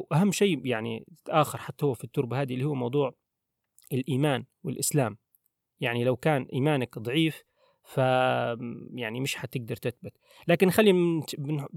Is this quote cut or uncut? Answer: uncut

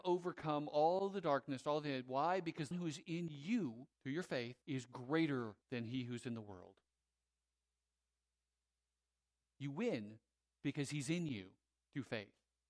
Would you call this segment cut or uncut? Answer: cut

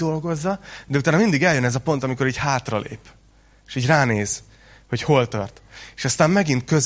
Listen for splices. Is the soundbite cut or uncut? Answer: uncut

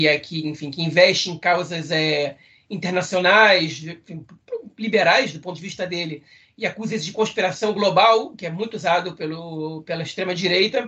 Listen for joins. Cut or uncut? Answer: uncut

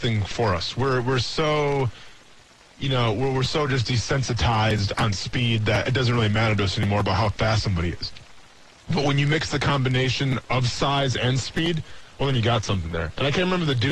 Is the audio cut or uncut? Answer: uncut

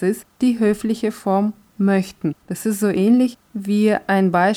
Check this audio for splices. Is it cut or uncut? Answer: cut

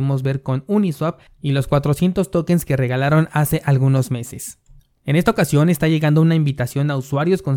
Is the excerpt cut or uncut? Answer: uncut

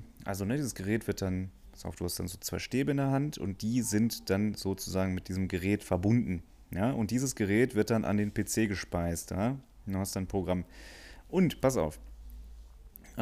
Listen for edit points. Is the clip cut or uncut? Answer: uncut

